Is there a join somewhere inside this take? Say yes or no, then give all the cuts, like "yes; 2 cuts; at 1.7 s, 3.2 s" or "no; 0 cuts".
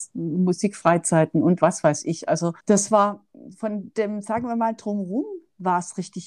yes; 1 cut; at 2.6 s